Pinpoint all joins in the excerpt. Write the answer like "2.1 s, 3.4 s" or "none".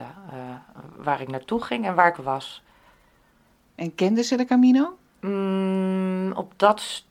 2.2 s, 5.1 s